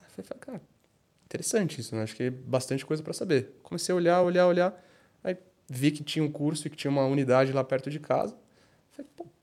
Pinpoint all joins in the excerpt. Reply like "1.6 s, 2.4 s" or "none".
none